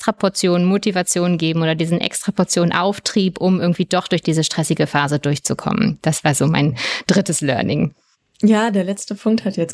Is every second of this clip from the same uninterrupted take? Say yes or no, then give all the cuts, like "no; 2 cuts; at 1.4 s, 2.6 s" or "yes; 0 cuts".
yes; 0 cuts